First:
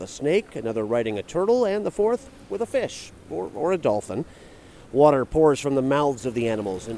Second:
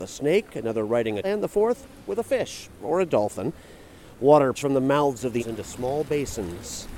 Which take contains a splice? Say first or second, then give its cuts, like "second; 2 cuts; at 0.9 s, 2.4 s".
second; 4 cuts; at 1.2 s, 2.8 s, 4.6 s, 5.4 s